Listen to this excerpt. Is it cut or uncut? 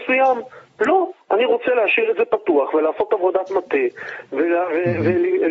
cut